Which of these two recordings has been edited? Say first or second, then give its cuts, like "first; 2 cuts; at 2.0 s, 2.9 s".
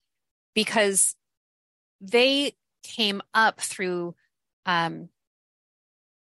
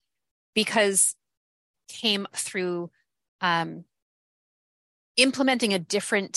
second; 2 cuts; at 1.7 s, 2.3 s